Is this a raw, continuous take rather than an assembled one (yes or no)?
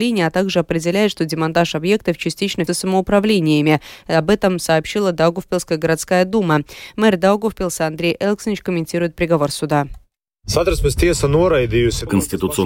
no